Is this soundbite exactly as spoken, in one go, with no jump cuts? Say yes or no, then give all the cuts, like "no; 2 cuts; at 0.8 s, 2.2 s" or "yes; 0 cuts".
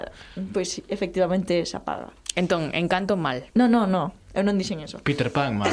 no; 1 cut; at 3.5 s